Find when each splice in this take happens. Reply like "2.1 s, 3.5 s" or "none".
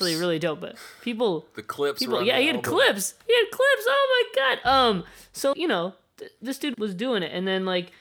5.5 s, 6.7 s